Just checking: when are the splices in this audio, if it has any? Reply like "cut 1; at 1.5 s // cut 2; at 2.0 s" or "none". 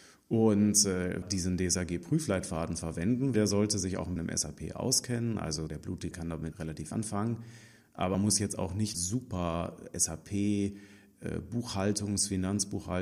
cut 1; at 1.2 s // cut 2; at 3.3 s // cut 3; at 4.2 s // cut 4; at 5.7 s // cut 5; at 6.1 s // cut 6; at 6.5 s // cut 7; at 6.9 s // cut 8; at 8.1 s // cut 9; at 8.9 s